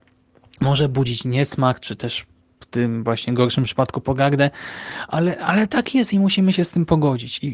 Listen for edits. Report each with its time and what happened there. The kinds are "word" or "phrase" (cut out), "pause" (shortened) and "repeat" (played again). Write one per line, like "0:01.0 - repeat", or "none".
none

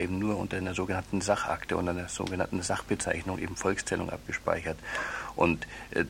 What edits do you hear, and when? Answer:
none

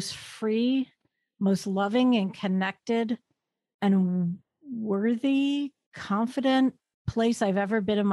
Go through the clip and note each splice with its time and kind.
none

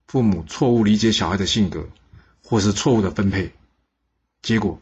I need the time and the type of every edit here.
none

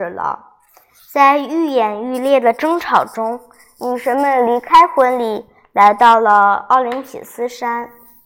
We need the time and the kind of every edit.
none

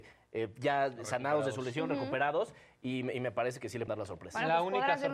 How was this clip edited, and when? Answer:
0:03.9 - word

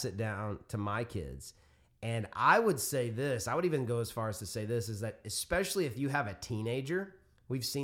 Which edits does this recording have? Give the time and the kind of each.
none

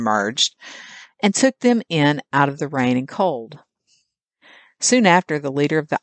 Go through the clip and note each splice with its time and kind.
none

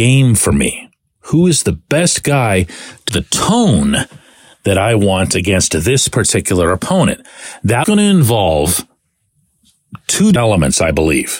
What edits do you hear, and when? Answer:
0:03.1 - word
0:07.8 - word
0:10.4 - word

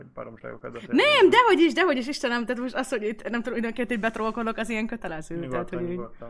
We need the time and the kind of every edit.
none

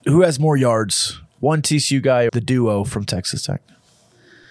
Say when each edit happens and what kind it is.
0:02.3 - word

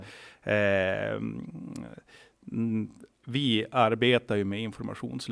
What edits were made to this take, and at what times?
0:03.2 - word

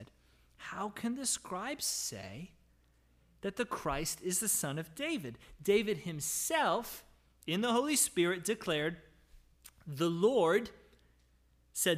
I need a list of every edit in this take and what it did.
none

